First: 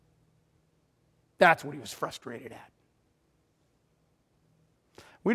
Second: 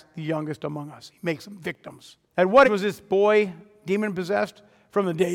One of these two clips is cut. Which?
second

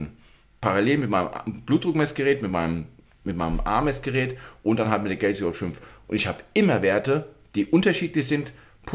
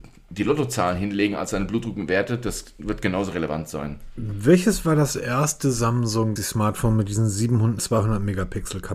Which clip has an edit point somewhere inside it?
second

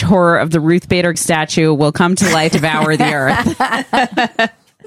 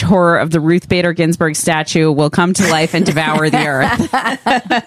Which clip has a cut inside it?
first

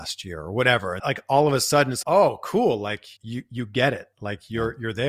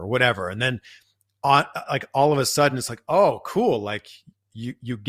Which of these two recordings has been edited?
first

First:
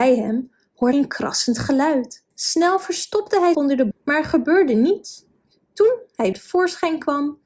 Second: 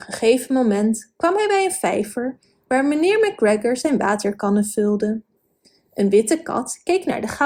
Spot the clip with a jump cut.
first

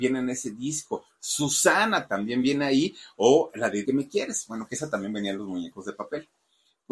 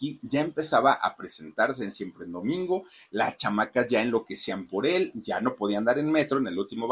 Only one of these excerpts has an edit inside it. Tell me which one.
first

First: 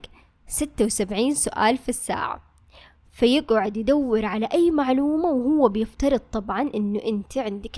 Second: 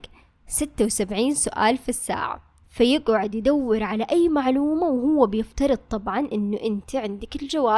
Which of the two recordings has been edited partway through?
second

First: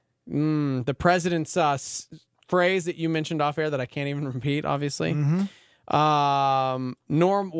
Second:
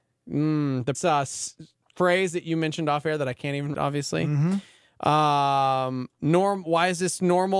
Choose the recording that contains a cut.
second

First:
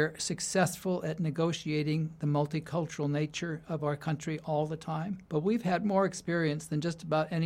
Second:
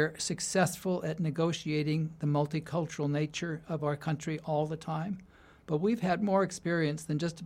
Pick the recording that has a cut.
first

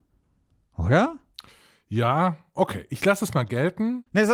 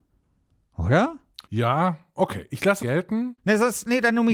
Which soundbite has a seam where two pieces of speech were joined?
second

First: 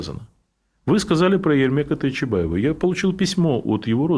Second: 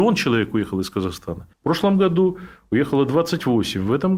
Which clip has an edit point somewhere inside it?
second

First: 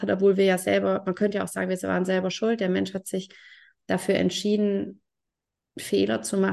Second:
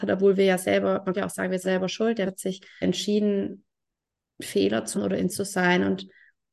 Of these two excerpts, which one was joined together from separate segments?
second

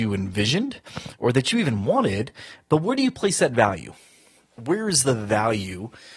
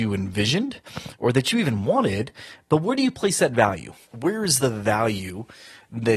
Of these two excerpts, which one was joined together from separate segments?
second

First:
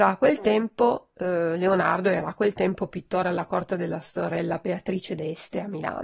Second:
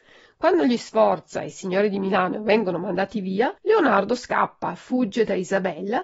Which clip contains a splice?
second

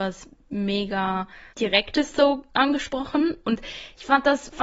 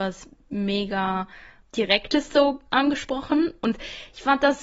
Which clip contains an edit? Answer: first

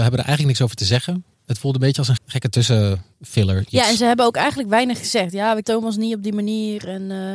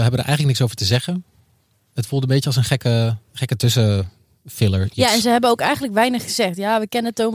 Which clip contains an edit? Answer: first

